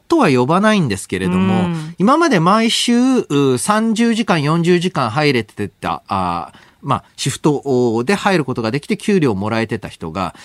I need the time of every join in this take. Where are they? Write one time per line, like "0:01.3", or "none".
none